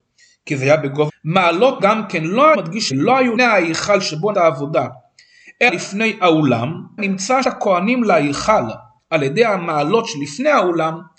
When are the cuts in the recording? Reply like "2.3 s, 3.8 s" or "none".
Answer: 1.1 s, 1.8 s, 2.5 s, 2.9 s, 3.4 s, 4.3 s, 5.7 s, 7.0 s, 7.4 s